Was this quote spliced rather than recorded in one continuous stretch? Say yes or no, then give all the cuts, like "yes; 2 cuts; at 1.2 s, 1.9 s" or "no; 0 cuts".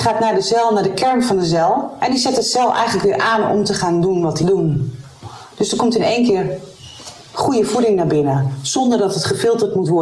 yes; 1 cut; at 4.4 s